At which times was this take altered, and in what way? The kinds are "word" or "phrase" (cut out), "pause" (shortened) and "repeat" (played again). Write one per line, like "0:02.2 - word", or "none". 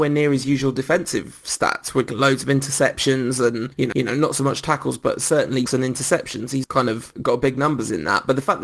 0:02.1 - phrase
0:03.9 - repeat
0:05.7 - word
0:06.6 - word